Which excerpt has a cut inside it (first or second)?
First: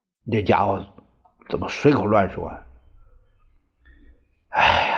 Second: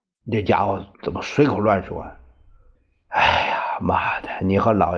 second